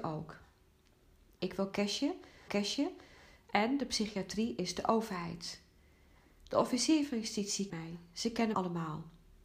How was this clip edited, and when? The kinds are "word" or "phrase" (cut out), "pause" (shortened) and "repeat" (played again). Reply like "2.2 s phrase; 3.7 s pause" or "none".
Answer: 2.5 s repeat; 7.7 s word; 8.5 s word